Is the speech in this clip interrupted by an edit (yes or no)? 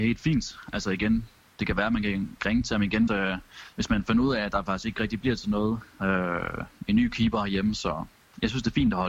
yes